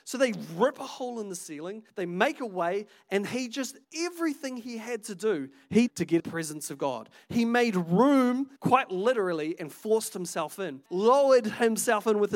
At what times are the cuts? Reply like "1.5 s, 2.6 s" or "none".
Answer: 1.9 s, 3.8 s, 5.9 s, 6.2 s, 8.6 s, 10.9 s